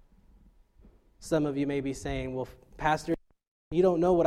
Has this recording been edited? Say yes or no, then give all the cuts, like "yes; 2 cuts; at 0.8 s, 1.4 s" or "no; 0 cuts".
no; 0 cuts